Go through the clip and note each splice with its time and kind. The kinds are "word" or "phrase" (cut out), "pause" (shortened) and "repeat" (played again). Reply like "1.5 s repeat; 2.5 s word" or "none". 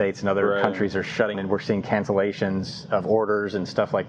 1.3 s word